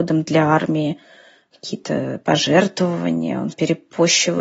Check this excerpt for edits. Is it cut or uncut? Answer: uncut